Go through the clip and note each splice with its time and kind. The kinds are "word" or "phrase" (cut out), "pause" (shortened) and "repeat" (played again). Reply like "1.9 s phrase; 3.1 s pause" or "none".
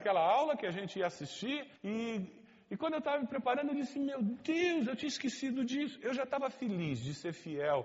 1.8 s pause